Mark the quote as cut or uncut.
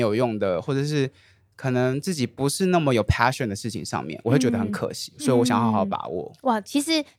uncut